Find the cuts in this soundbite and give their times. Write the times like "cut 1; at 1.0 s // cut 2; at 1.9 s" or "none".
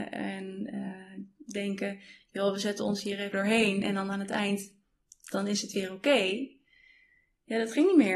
cut 1; at 3.3 s